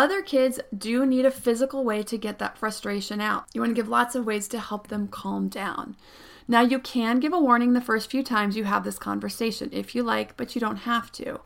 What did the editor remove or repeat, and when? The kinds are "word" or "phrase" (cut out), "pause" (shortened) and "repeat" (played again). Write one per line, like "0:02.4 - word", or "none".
none